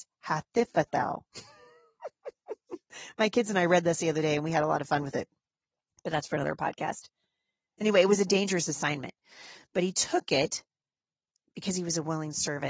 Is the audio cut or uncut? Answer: uncut